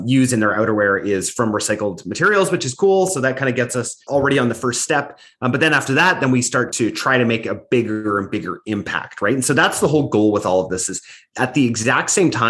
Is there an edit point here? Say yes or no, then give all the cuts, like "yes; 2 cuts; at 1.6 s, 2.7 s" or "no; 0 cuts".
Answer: yes; 1 cut; at 4.0 s